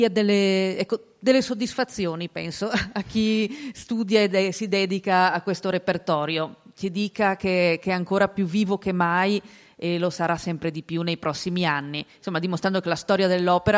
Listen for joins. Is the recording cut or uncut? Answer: uncut